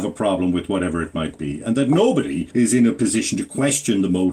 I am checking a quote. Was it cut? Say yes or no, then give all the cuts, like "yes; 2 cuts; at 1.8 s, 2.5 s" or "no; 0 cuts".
yes; 1 cut; at 2.5 s